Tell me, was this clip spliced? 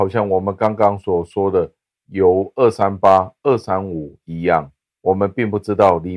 no; 0 cuts

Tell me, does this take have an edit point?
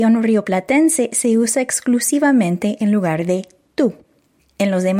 no; 0 cuts

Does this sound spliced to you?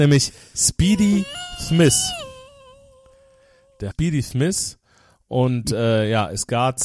yes; 1 cut; at 3.9 s

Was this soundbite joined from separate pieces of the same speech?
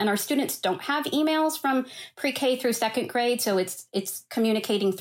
no; 0 cuts

